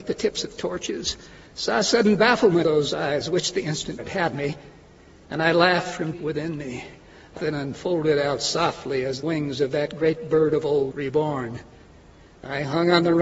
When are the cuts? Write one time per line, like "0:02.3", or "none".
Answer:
0:02.6
0:04.0
0:06.1
0:07.4
0:09.2
0:10.9